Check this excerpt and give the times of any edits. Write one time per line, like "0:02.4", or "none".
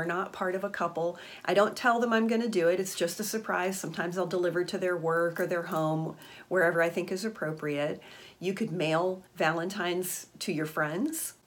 0:09.3